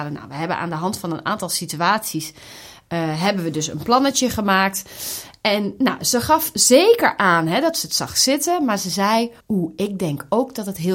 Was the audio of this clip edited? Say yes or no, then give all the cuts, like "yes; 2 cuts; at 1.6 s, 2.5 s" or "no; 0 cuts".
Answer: yes; 1 cut; at 9.4 s